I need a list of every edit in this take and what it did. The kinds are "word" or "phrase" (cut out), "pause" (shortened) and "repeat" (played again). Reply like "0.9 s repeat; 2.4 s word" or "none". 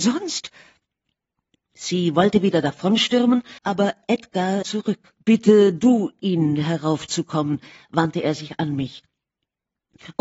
3.6 s pause; 4.6 s phrase; 5.2 s pause